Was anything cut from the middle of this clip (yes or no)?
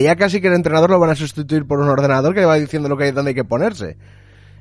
no